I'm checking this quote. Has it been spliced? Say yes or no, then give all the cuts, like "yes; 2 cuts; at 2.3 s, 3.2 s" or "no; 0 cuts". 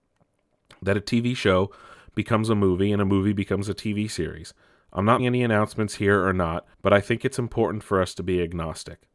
yes; 2 cuts; at 5.2 s, 6.7 s